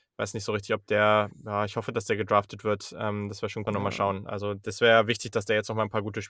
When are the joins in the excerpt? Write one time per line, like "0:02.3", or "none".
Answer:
0:03.7